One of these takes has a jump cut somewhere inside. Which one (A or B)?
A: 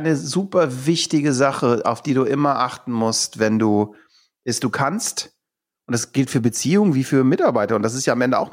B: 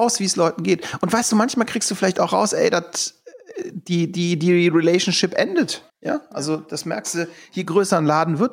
B